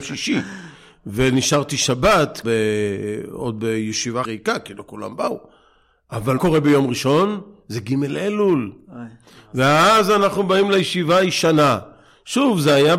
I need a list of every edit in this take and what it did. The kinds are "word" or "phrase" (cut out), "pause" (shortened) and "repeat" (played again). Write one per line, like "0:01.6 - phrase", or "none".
0:02.4 - word
0:04.2 - word
0:06.4 - word